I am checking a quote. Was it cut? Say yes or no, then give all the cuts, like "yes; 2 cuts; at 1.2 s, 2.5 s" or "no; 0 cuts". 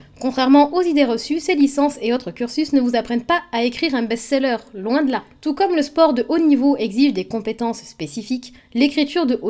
no; 0 cuts